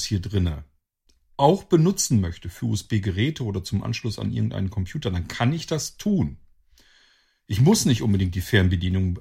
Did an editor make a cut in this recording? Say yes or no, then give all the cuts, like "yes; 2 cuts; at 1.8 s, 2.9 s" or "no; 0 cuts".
no; 0 cuts